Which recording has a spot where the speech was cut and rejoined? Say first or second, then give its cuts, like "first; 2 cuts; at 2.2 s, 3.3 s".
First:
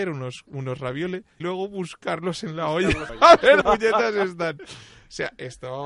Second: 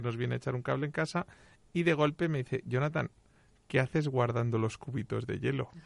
first; 3 cuts; at 1.4 s, 3.1 s, 3.6 s